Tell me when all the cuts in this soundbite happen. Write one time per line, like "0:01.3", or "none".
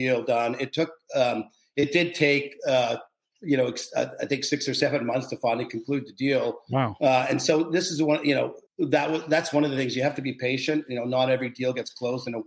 0:08.7